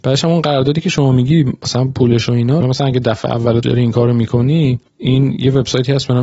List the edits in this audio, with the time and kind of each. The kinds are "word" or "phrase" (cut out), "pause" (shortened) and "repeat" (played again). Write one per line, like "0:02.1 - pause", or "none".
0:02.6 - phrase
0:03.6 - word
0:04.9 - pause